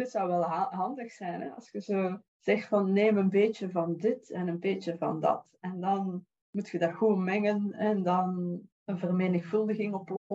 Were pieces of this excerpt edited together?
yes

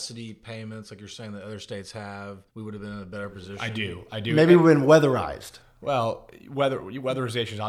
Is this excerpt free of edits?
no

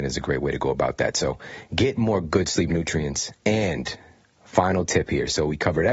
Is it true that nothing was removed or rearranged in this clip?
yes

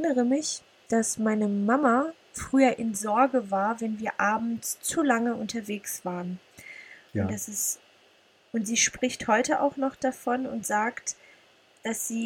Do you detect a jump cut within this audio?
no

